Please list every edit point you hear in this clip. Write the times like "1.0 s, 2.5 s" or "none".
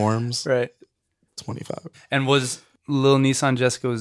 1.9 s